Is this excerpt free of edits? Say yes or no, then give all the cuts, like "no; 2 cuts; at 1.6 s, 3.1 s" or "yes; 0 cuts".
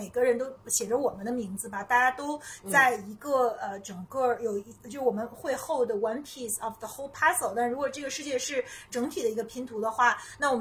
yes; 0 cuts